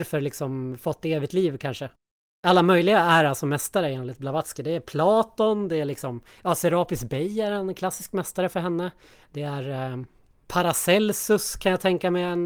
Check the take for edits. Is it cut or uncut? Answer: cut